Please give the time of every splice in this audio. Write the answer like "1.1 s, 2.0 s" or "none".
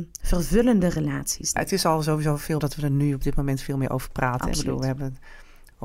1.6 s, 2.6 s